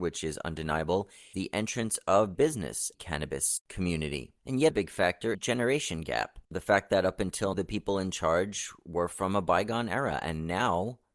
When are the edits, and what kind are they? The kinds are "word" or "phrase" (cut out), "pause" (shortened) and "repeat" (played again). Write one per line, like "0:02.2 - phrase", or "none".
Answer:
0:01.3 - word
0:02.4 - word
0:02.9 - phrase
0:04.4 - pause
0:04.7 - word
0:05.3 - phrase
0:06.4 - pause
0:07.5 - word